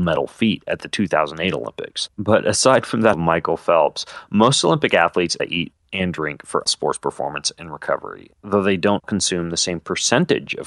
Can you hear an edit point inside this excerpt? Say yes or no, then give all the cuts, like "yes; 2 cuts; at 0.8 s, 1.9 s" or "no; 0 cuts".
yes; 5 cuts; at 2.1 s, 3.1 s, 5.4 s, 6.7 s, 9.0 s